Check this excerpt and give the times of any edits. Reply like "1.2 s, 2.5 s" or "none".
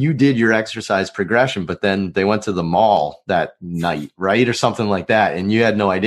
none